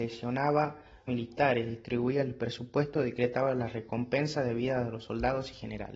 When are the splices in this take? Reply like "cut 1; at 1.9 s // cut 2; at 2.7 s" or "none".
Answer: cut 1; at 1.1 s